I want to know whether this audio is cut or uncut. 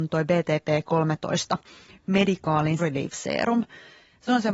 cut